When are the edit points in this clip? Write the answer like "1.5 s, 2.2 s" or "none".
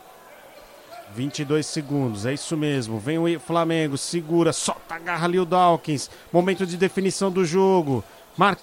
1.0 s